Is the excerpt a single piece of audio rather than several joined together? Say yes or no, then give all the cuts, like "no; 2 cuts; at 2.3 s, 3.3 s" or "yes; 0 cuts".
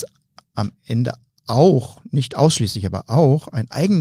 yes; 0 cuts